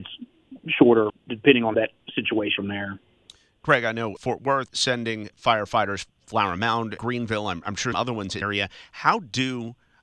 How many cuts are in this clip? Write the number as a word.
nine